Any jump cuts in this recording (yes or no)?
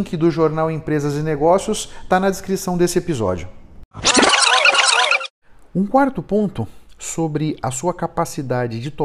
no